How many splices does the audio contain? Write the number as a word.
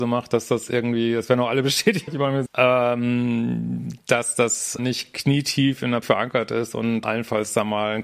five